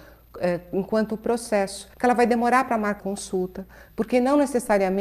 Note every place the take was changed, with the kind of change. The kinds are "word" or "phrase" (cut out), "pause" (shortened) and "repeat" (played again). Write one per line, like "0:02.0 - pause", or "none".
0:01.9 - pause
0:03.0 - word